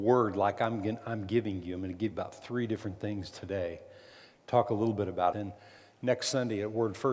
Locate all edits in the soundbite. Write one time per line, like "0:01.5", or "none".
0:02.1
0:05.3